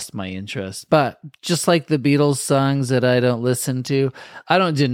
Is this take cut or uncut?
uncut